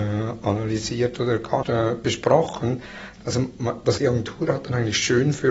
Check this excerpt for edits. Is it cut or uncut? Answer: cut